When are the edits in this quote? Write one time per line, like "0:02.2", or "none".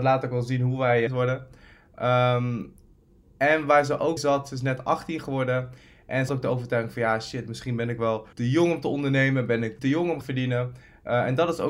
0:01.1
0:04.2
0:06.3
0:08.3
0:09.8
0:10.2